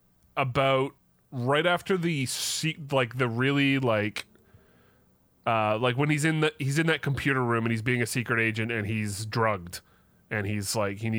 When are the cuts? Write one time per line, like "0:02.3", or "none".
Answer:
0:01.2